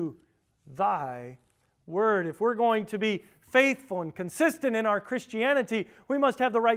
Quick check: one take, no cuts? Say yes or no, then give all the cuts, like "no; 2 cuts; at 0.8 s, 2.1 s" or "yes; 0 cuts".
yes; 0 cuts